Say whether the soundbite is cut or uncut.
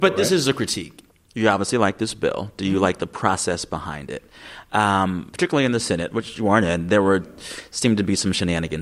uncut